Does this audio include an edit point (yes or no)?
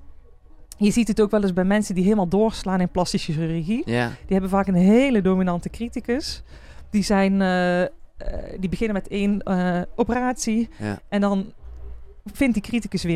no